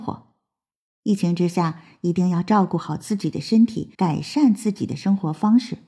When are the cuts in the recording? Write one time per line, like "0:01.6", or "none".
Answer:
0:03.9

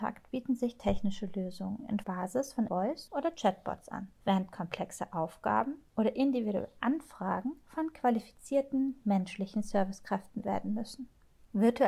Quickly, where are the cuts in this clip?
0:02.0
0:02.7
0:03.1
0:04.2
0:10.4

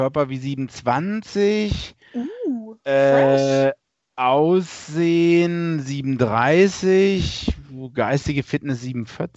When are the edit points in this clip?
none

